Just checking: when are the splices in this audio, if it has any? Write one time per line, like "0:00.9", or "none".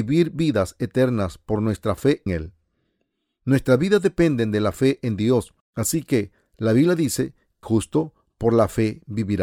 0:02.3
0:05.6
0:07.6